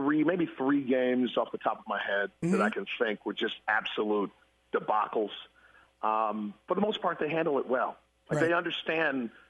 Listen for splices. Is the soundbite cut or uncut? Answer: uncut